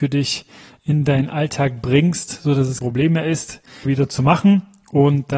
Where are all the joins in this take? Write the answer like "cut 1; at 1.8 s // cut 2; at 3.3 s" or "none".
cut 1; at 2.8 s // cut 2; at 3.8 s